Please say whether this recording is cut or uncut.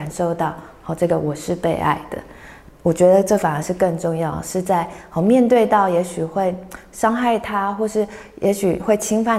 uncut